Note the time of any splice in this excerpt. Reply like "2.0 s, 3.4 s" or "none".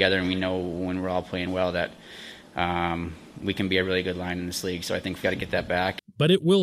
5.2 s